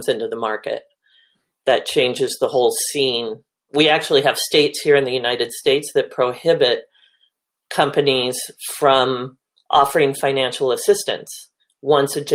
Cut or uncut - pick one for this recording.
uncut